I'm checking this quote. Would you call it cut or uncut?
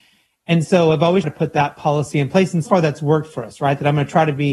cut